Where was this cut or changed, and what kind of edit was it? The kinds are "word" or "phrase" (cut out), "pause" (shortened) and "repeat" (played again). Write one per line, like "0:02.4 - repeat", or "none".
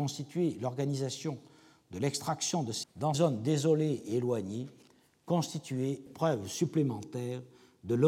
0:02.8 - word
0:03.1 - word
0:06.1 - word